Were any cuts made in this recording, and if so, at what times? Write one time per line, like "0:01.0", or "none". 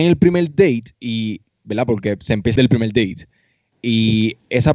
0:00.9
0:02.6